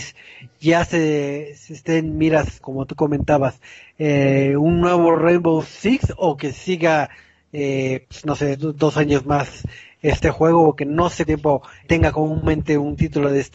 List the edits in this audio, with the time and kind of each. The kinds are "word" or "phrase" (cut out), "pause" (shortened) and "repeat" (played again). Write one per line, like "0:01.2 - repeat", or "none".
0:02.6 - word
0:08.5 - word
0:11.3 - word
0:11.8 - word